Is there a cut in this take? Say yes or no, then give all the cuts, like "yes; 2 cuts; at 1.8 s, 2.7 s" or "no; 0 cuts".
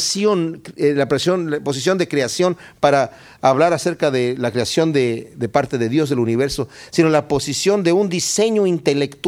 no; 0 cuts